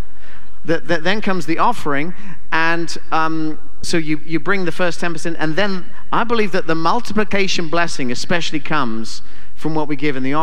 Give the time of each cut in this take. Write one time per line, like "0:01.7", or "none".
0:03.8